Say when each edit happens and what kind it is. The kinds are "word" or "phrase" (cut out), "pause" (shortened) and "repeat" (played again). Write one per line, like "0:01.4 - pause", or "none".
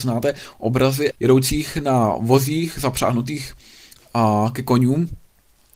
0:01.1 - word

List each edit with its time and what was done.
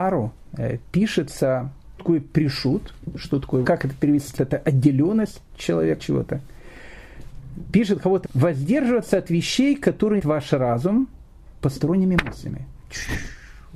0:02.0 - word
0:03.6 - word
0:04.4 - word
0:06.0 - word
0:08.2 - word
0:10.2 - word

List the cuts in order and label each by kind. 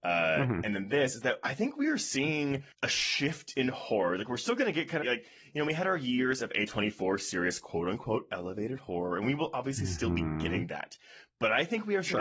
0:02.7 - pause
0:05.0 - word

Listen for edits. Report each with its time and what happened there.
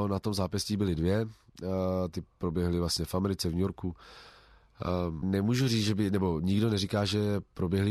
0:05.2 - word

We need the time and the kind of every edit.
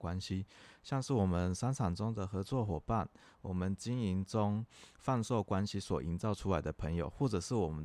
none

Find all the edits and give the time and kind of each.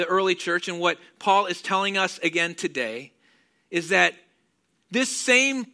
none

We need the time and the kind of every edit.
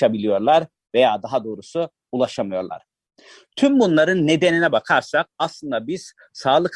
none

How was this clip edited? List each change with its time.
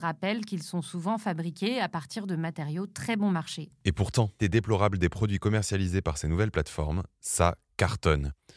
0:04.4 - phrase

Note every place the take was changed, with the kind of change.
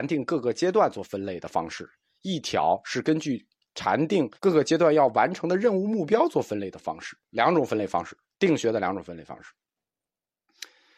0:04.4 - pause
0:07.2 - pause

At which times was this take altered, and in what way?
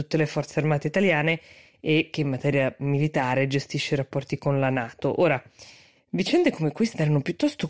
none

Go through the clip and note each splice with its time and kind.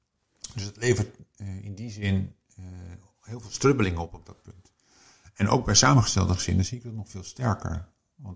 none

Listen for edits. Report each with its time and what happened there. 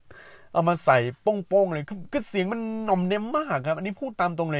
none

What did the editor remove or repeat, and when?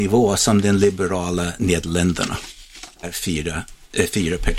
0:03.0 - word

